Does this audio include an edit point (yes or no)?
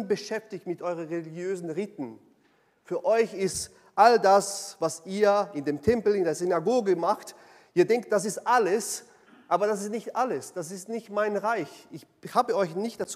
no